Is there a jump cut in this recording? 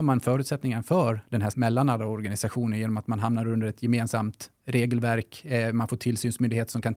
yes; 1 cut; at 1.5 s

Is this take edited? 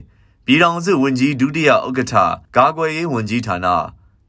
yes; 1 cut; at 2.4 s

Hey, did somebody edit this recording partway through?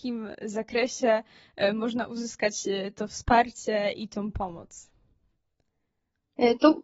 no; 0 cuts

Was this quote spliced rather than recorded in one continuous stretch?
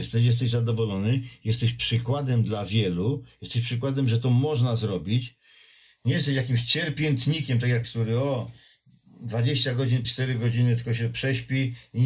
yes; 2 cuts; at 7.8 s, 10.0 s

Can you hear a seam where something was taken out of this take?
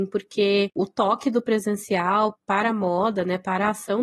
yes; 1 cut; at 2.3 s

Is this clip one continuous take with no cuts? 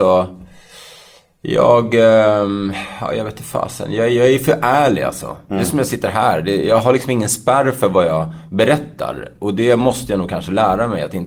yes; 0 cuts

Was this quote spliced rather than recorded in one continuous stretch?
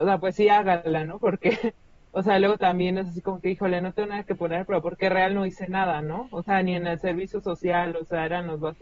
no; 0 cuts

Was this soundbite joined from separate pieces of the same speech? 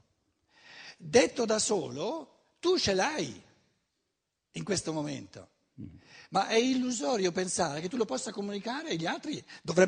no; 0 cuts

